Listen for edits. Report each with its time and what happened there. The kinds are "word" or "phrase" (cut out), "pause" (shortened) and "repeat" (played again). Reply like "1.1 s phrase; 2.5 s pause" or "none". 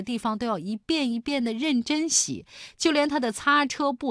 none